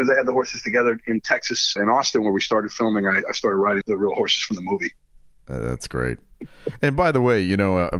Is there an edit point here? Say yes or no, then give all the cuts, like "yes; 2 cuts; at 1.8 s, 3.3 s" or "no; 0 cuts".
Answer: yes; 2 cuts; at 1.8 s, 3.8 s